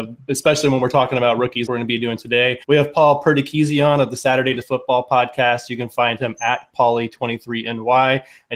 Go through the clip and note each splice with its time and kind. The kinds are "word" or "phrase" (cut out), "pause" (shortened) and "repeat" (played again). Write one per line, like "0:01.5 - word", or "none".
0:01.7 - word
0:02.6 - pause
0:04.6 - word